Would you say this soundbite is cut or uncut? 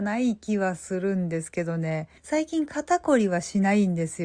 cut